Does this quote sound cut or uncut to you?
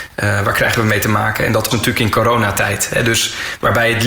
cut